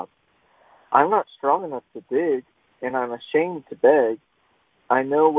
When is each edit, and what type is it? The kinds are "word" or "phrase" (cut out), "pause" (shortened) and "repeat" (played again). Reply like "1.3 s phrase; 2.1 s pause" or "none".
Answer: none